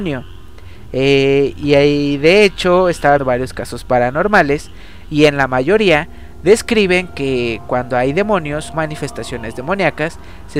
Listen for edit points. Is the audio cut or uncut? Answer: cut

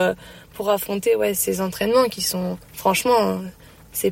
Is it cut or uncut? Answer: cut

